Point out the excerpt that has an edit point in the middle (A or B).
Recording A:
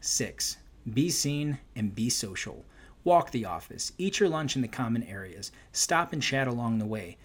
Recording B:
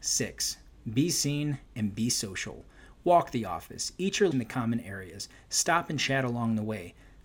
B